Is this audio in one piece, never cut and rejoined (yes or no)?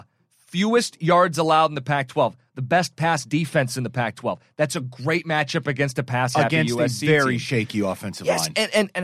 yes